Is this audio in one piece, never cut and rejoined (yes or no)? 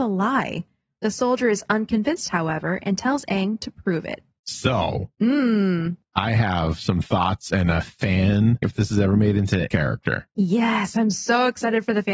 no